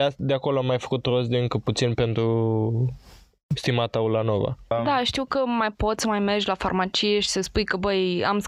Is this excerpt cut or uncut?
uncut